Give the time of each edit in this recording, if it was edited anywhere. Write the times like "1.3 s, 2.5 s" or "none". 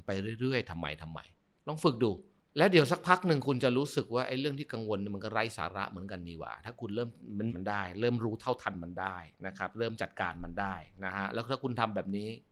7.5 s